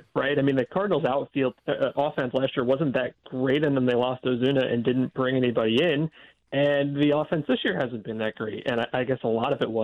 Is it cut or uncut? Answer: uncut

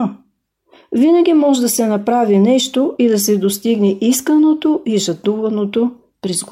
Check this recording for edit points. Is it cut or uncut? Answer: uncut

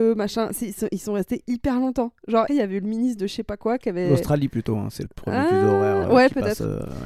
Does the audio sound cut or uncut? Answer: cut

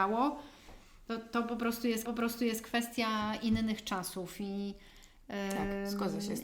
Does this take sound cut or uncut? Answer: cut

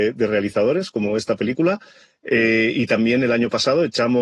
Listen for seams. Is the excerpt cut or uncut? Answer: uncut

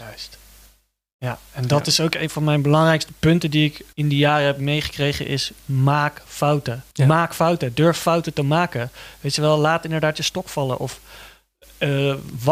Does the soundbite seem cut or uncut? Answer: cut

